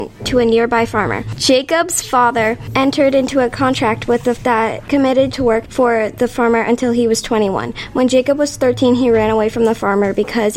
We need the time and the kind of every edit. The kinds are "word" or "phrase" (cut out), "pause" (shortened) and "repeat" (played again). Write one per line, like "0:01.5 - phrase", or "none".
0:04.4 - word
0:05.3 - word